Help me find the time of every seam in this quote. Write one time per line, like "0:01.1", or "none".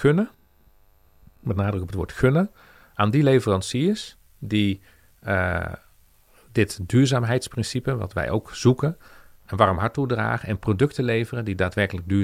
none